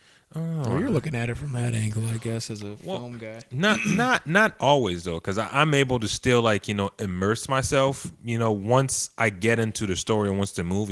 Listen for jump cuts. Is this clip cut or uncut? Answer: uncut